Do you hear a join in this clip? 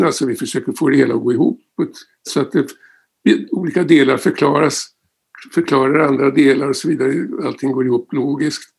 yes; 1 cut; at 2.3 s

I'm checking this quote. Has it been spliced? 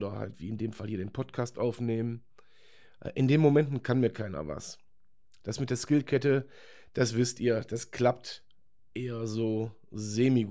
no; 0 cuts

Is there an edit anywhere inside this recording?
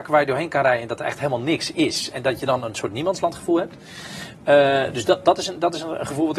no; 0 cuts

